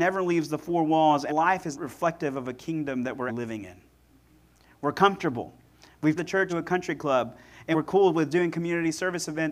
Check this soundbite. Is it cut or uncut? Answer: cut